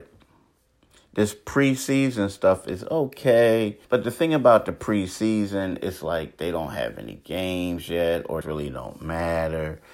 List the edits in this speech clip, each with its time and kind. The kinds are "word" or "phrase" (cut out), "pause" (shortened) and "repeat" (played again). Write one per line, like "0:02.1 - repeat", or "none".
0:03.8 - pause
0:08.4 - phrase

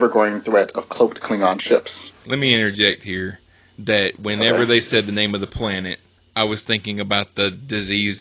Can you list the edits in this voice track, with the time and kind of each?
0:06.2 - pause

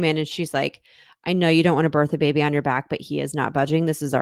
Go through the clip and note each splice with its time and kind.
none

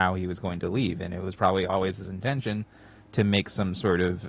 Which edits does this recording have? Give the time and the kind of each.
none

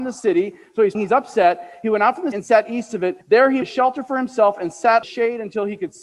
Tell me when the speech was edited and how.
0:00.9 - word
0:02.3 - word
0:03.2 - pause
0:03.6 - word
0:05.0 - phrase

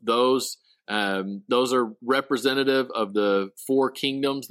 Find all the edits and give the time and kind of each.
none

